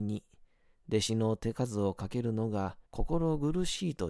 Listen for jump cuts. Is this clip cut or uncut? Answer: cut